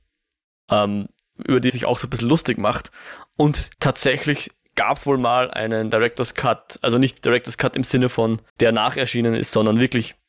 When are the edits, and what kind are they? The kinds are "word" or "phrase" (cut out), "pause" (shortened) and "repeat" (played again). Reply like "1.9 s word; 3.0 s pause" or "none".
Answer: 1.7 s word; 3.7 s pause; 8.5 s pause